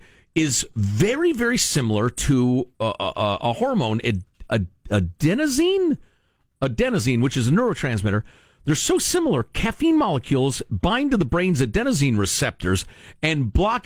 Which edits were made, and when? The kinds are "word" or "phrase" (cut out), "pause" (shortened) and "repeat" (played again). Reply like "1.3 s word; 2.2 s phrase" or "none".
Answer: none

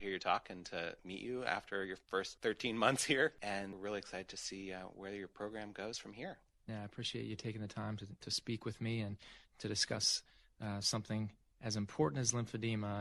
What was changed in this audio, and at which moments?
none

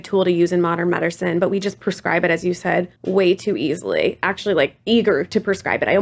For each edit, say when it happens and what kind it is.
3.0 s pause

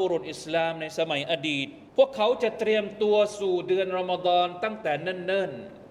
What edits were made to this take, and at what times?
1.9 s pause

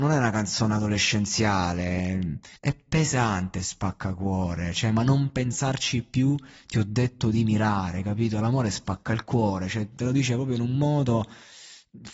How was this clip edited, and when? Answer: 2.6 s pause

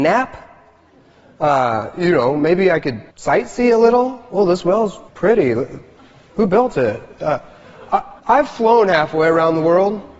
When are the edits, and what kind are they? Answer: 3.1 s pause; 5.1 s pause; 8.2 s pause

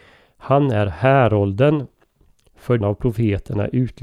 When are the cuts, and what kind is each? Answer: 2.8 s word

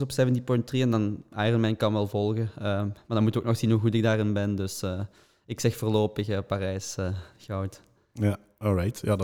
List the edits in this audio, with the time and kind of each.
none

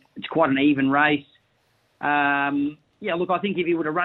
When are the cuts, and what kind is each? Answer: none

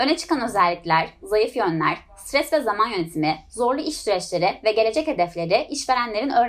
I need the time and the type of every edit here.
none

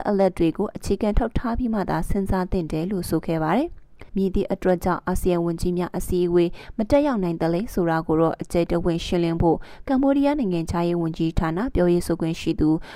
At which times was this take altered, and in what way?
4.1 s pause

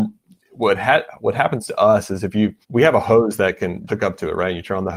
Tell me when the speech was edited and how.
2.6 s pause; 3.9 s word

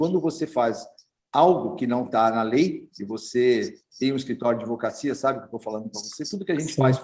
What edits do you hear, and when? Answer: none

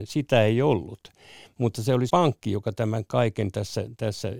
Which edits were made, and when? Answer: 2.1 s word

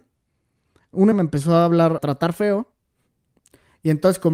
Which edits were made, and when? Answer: 1.1 s word; 2.0 s word

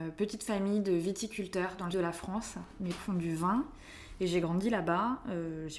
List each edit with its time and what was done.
1.9 s word; 3.0 s word; 4.4 s word

